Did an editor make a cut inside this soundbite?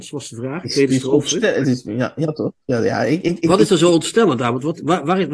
yes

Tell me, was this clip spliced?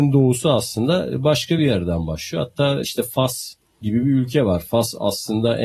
no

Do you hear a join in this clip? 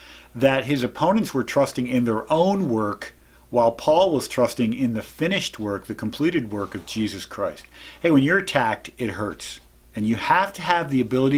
no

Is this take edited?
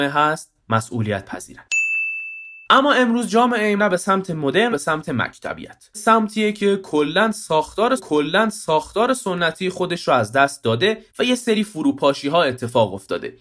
yes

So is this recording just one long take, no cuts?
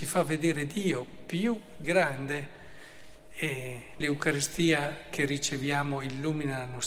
no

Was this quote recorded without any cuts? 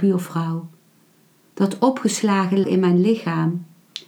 no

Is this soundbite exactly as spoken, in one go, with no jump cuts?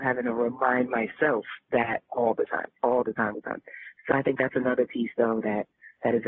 no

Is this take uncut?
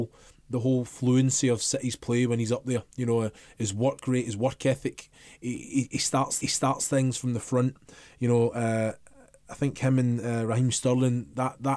no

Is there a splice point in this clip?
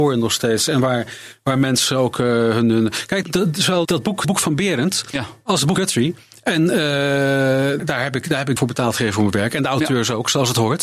yes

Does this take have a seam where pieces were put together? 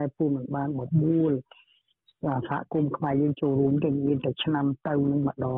no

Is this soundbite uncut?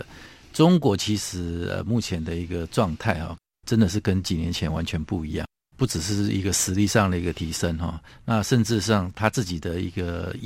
yes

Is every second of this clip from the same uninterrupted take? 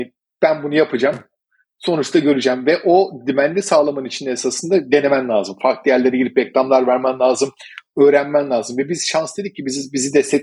yes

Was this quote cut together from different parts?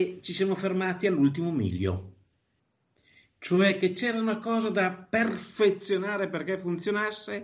no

